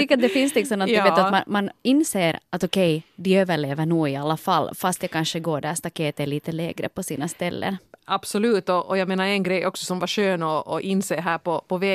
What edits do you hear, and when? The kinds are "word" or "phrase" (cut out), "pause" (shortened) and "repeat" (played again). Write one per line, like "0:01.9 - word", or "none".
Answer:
none